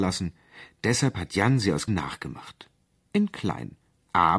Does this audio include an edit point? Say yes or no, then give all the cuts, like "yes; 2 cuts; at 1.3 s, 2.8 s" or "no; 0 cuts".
yes; 1 cut; at 1.9 s